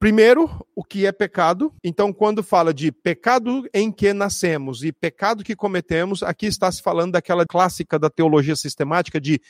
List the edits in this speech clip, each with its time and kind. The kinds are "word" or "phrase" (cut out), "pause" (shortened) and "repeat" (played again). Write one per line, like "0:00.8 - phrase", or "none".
0:01.8 - pause
0:07.5 - word